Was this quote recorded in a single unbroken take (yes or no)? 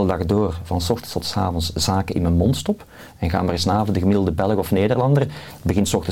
yes